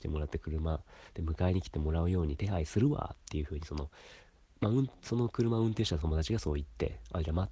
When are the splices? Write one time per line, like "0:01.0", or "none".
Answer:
none